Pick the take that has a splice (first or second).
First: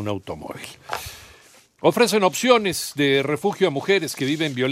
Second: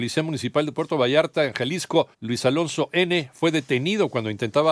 second